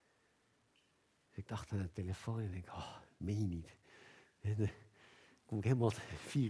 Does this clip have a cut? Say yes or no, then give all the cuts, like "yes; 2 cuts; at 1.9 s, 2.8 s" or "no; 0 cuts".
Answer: no; 0 cuts